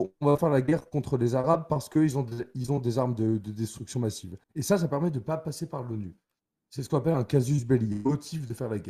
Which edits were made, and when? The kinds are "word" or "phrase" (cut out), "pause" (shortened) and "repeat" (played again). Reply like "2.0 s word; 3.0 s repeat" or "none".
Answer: 4.4 s pause